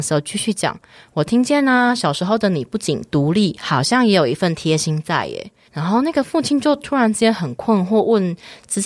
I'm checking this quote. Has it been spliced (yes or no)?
yes